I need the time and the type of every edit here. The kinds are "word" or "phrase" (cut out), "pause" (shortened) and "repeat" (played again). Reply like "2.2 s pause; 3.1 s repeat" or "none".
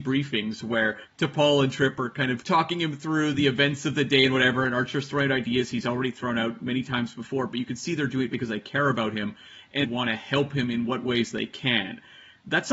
9.8 s word